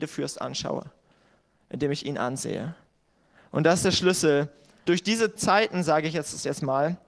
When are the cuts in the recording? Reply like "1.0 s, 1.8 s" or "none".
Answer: 4.9 s, 5.4 s